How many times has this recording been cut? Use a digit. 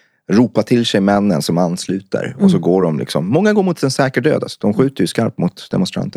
0